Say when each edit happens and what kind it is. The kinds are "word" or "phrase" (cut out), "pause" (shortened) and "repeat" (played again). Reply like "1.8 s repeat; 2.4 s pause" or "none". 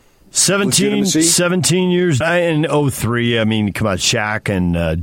2.2 s phrase